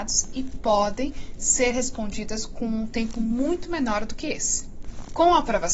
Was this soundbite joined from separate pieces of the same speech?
no; 0 cuts

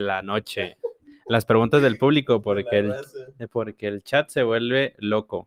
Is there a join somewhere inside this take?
no; 0 cuts

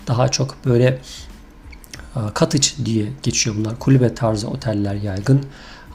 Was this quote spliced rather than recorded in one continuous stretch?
no; 0 cuts

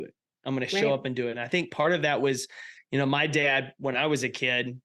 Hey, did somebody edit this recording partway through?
no; 0 cuts

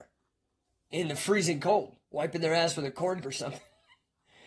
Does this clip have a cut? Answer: yes; 2 cuts; at 2.0 s, 3.2 s

